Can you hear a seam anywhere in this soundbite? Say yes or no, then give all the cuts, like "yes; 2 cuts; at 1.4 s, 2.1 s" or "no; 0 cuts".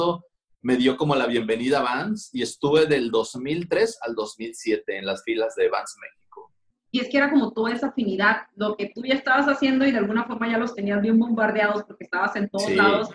no; 0 cuts